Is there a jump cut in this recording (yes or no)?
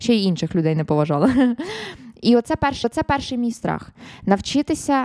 yes